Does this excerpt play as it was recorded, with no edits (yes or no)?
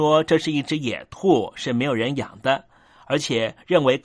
yes